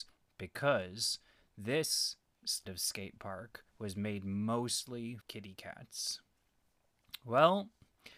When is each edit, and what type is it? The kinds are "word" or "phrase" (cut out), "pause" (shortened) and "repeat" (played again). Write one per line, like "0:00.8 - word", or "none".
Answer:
0:02.7 - word
0:03.7 - pause
0:05.2 - word